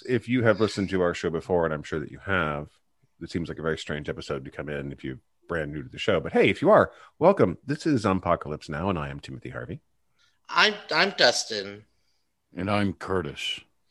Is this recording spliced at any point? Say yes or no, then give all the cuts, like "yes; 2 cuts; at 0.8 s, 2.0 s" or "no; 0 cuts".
no; 0 cuts